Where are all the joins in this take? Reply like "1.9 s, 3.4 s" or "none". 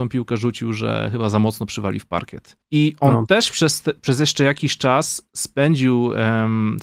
2.6 s